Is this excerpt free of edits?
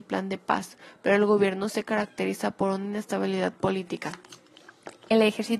yes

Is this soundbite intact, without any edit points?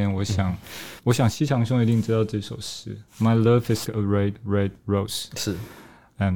no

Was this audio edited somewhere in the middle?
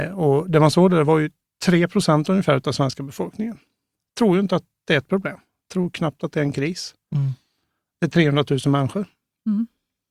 no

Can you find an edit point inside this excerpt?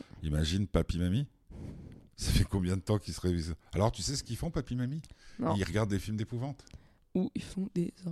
no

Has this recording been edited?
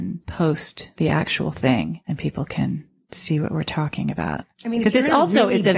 no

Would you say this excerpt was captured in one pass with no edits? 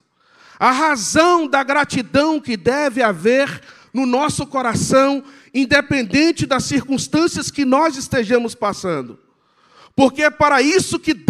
yes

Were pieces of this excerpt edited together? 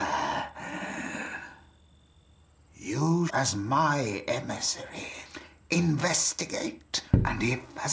yes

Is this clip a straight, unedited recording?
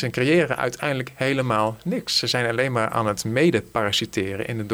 yes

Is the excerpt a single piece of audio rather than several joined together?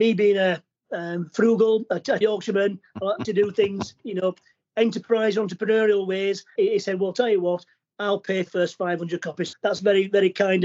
no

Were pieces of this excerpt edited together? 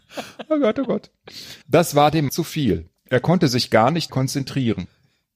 yes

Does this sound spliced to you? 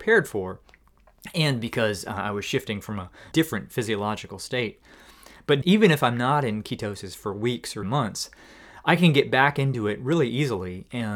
yes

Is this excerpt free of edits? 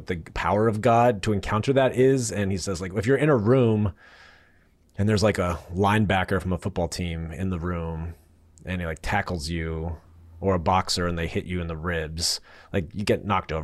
yes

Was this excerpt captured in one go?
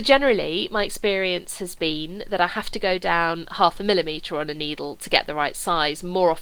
yes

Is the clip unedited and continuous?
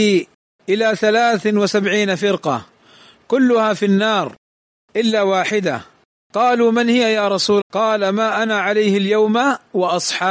no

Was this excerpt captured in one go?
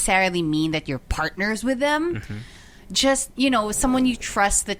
yes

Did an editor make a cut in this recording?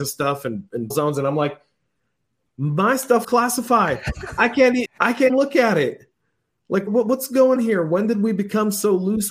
yes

